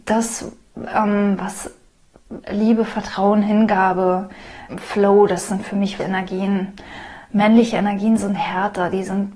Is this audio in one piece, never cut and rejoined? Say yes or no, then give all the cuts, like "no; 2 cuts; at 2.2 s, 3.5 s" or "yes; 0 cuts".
no; 3 cuts; at 2.4 s, 4.7 s, 6.0 s